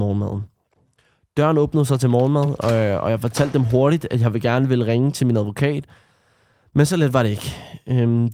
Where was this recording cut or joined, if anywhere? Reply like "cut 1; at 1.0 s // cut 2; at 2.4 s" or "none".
none